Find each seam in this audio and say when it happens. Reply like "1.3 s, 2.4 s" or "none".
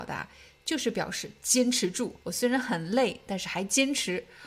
2.2 s